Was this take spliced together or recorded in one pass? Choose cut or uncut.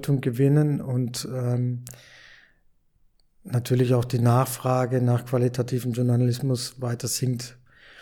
uncut